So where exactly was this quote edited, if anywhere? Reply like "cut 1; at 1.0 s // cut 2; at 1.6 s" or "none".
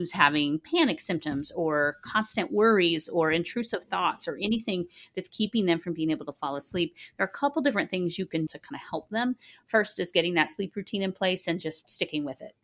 cut 1; at 8.5 s